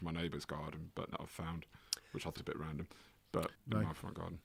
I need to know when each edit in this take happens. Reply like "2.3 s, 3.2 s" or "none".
1.1 s, 2.4 s, 3.5 s